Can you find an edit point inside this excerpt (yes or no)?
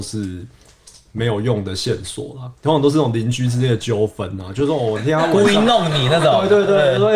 yes